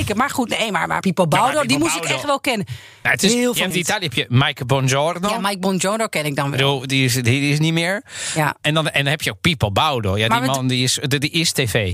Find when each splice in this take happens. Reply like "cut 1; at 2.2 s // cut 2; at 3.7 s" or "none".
cut 1; at 1.0 s // cut 2; at 3.7 s